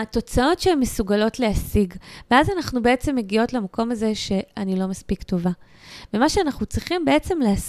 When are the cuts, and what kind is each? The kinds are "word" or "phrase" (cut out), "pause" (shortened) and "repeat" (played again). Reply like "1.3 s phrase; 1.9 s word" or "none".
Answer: none